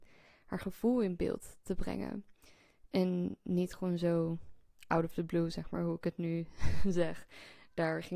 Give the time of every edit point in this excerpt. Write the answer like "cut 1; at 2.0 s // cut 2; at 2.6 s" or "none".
none

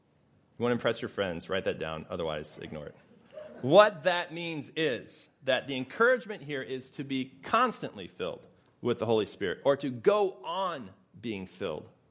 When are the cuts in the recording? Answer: cut 1; at 8.6 s

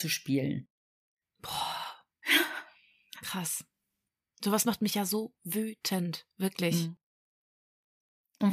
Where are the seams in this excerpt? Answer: none

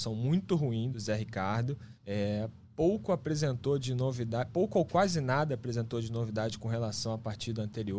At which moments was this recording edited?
cut 1; at 0.9 s // cut 2; at 2.0 s

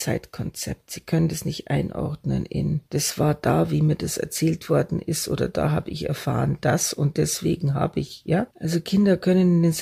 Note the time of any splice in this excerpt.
cut 1; at 2.9 s // cut 2; at 8.5 s

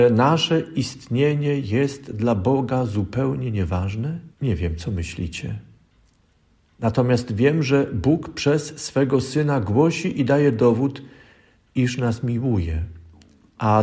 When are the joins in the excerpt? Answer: cut 1; at 4.3 s

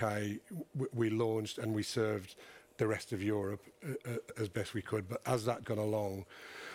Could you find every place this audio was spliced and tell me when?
cut 1; at 4.3 s // cut 2; at 5.6 s

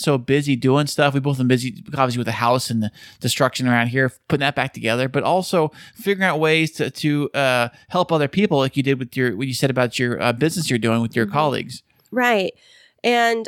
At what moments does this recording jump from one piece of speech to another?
none

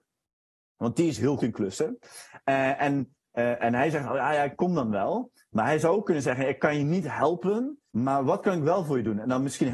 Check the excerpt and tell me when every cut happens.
cut 1; at 1.4 s // cut 2; at 7.9 s

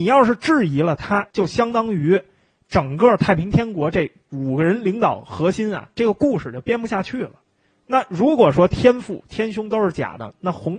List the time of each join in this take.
cut 1; at 1.3 s

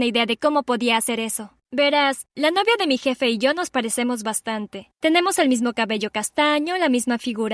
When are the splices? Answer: cut 1; at 4.9 s

